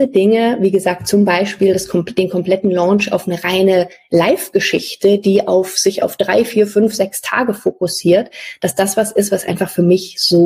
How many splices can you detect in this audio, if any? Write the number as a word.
zero